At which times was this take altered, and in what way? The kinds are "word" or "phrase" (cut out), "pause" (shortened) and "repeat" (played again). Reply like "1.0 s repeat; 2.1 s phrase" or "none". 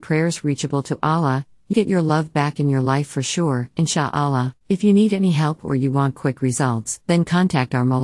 1.7 s word; 4.6 s pause; 7.0 s pause